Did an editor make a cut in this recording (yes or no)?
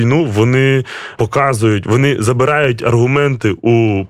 yes